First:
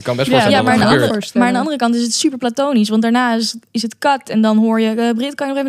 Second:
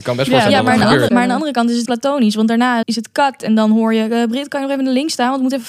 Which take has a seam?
second; 3 cuts; at 1.1 s, 1.9 s, 2.8 s

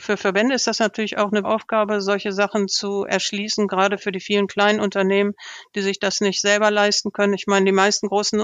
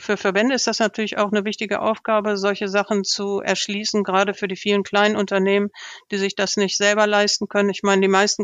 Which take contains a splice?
first; 1 cut; at 1.4 s

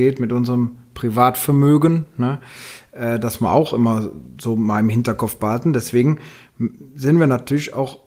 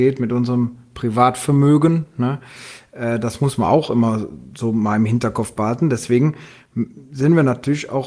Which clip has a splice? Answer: first; 1 cut; at 3.4 s

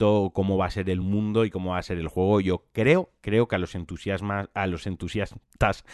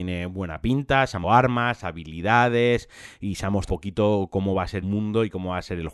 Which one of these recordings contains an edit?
second; 3 cuts; at 1.2 s, 3.7 s, 4.8 s

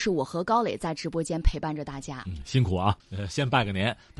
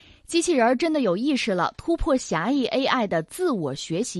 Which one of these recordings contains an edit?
first; 1 cut; at 3.0 s

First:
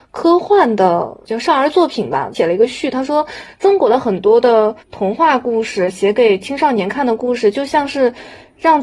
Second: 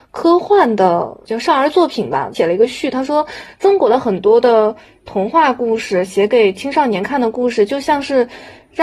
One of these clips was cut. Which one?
first; 1 cut; at 4.8 s

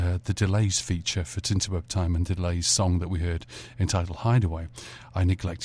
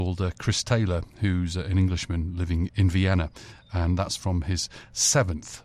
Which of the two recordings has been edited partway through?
second; 1 cut; at 2.7 s

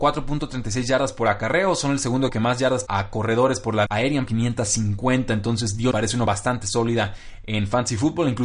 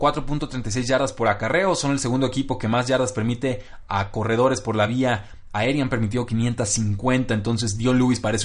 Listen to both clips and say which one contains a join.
first; 6 cuts; at 2.3 s, 2.9 s, 3.9 s, 4.3 s, 5.9 s, 6.3 s

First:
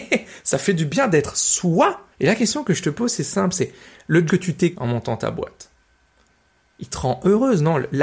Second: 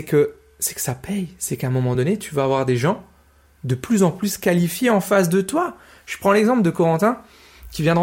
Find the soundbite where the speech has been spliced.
first; 3 cuts; at 2.1 s, 4.3 s, 4.7 s

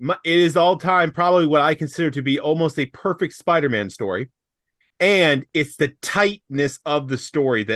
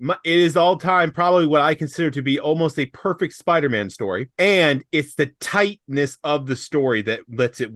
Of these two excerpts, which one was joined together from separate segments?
second; 1 cut; at 4.3 s

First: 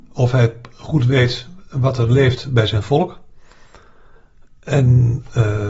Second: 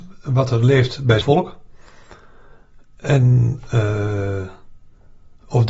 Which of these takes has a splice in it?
second; 1 cut; at 1.2 s

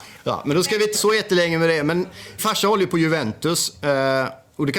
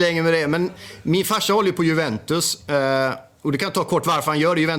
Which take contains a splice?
first; 2 cuts; at 0.9 s, 2.4 s

